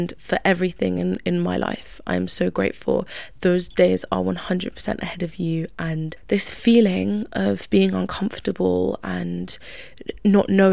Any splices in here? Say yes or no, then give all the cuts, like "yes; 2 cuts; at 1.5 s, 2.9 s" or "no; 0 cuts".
no; 0 cuts